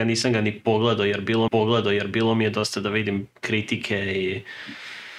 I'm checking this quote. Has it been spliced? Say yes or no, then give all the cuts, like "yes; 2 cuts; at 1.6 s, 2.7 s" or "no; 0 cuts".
yes; 1 cut; at 1.5 s